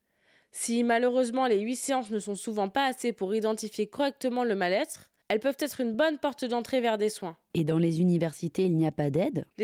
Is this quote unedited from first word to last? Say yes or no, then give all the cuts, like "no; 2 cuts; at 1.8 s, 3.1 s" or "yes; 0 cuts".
yes; 0 cuts